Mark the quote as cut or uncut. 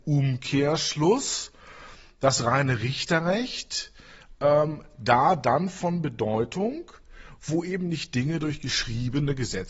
uncut